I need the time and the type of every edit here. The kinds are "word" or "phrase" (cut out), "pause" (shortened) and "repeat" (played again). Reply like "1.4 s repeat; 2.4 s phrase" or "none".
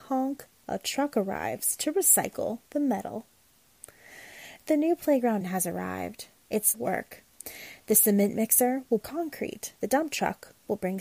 5.4 s word; 6.7 s phrase; 9.0 s word; 9.8 s pause